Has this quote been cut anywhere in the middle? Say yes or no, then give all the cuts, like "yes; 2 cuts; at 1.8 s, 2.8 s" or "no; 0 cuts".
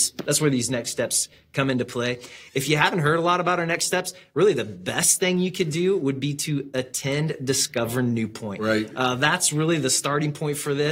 no; 0 cuts